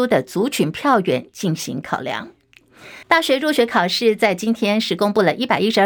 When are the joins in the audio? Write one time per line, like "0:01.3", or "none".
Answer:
0:03.0